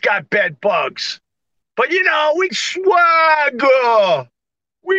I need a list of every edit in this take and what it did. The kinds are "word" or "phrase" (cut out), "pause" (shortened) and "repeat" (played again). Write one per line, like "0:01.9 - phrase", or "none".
0:01.6 - pause
0:02.5 - word